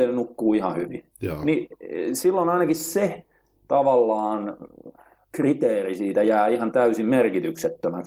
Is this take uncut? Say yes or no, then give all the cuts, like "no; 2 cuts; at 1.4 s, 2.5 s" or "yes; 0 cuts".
yes; 0 cuts